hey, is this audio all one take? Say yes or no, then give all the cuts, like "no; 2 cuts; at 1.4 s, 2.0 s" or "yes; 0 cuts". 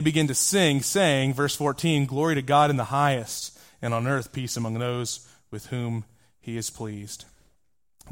yes; 0 cuts